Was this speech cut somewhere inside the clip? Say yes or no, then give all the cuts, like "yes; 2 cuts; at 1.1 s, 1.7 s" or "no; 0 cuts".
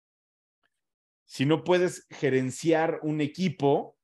no; 0 cuts